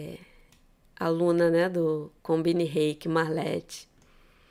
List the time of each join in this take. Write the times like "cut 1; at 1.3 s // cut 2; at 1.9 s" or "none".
cut 1; at 2.2 s